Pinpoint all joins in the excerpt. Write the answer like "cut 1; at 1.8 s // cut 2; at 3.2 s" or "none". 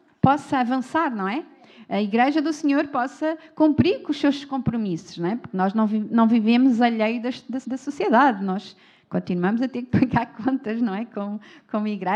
cut 1; at 7.6 s